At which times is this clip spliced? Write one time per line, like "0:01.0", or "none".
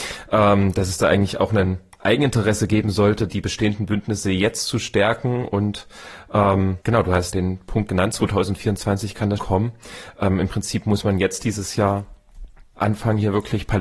0:03.3
0:06.8
0:07.3
0:09.4

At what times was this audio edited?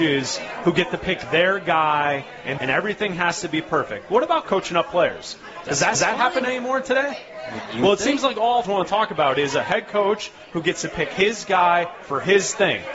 0:02.6
0:04.4
0:05.9
0:08.6

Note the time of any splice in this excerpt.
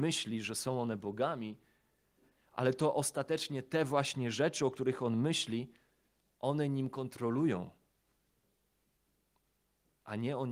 none

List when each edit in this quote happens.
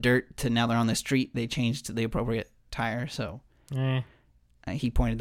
none

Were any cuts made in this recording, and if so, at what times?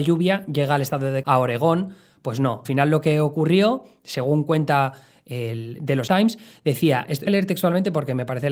0:01.2
0:02.7
0:06.1
0:07.3

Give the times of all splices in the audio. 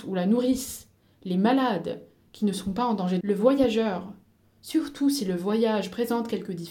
0:03.2

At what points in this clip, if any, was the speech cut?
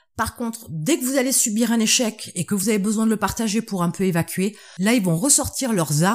none

